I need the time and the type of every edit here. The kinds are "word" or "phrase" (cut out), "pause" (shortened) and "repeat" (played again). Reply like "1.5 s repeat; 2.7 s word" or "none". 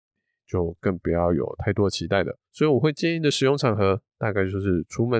2.5 s pause